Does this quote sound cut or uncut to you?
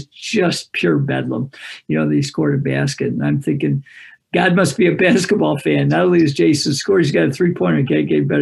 uncut